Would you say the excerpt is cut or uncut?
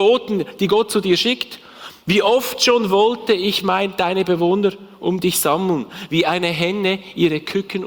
uncut